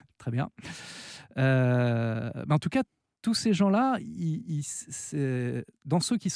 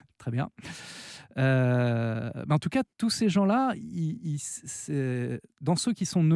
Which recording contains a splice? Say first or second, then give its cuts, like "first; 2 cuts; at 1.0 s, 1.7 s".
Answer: second; 1 cut; at 2.9 s